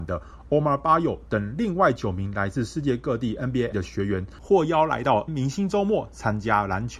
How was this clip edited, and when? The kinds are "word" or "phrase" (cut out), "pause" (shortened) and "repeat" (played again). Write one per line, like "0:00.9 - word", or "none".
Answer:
0:03.7 - word
0:05.3 - word